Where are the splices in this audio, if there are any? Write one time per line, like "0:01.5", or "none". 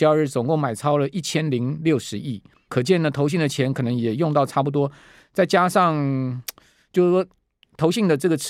0:02.7